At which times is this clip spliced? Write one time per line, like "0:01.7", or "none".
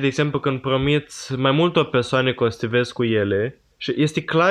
none